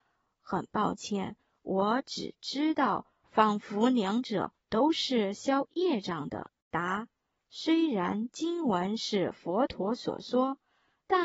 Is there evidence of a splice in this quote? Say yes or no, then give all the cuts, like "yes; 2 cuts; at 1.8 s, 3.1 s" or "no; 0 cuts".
yes; 1 cut; at 6.6 s